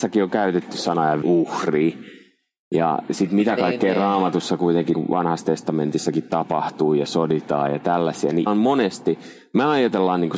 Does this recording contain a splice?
yes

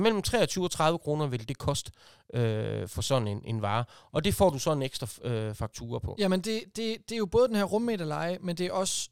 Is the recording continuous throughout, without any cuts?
yes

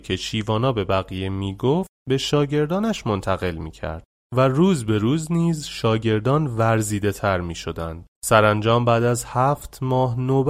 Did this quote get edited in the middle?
yes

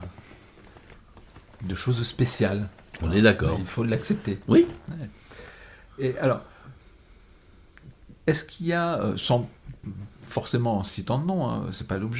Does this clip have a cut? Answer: no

